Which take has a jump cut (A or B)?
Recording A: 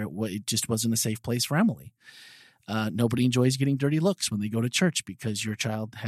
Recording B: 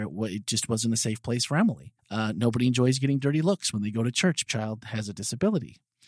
B